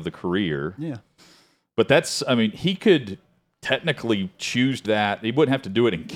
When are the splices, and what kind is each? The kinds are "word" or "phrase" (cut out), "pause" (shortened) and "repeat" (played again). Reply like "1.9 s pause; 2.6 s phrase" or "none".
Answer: 4.8 s word